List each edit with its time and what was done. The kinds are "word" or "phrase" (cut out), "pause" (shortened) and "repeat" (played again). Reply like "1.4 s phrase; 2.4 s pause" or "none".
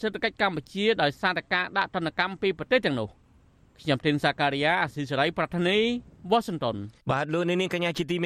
7.0 s pause